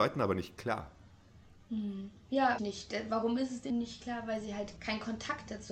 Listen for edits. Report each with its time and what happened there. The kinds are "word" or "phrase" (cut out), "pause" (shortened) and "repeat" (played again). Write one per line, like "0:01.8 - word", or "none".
0:02.6 - word
0:03.7 - word
0:04.8 - word